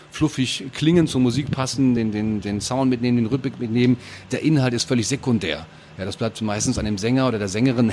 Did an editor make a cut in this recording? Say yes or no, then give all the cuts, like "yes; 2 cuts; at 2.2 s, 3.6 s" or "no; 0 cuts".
no; 0 cuts